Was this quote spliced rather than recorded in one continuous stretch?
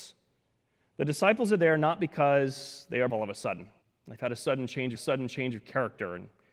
yes; 3 cuts; at 3.1 s, 3.8 s, 5.0 s

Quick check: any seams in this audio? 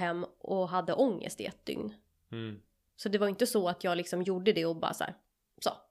no; 0 cuts

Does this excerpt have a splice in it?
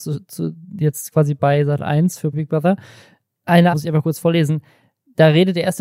yes; 2 cuts; at 2.3 s, 3.7 s

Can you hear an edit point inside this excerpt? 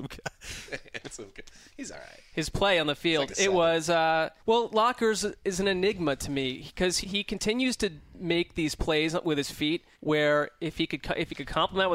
yes; 3 cuts; at 4.4 s, 7.0 s, 9.9 s

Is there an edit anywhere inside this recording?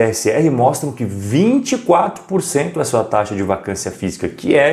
no; 0 cuts

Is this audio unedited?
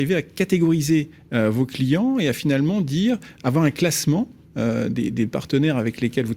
yes; 0 cuts

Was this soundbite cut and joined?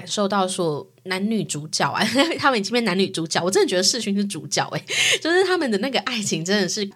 no; 0 cuts

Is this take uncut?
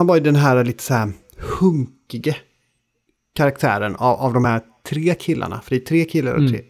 yes; 0 cuts

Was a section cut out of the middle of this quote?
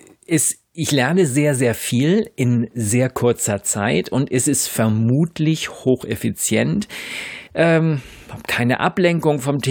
yes; 1 cut; at 7.5 s

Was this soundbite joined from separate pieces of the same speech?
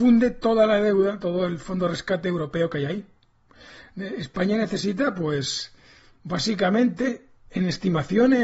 no; 0 cuts

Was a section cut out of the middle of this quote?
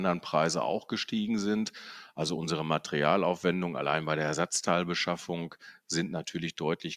no; 0 cuts

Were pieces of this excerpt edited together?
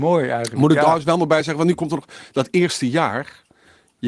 no; 0 cuts

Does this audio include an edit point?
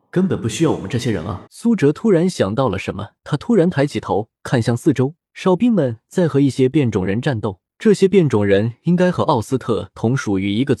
yes; 5 cuts; at 1.5 s, 3.2 s, 4.4 s, 5.3 s, 7.7 s

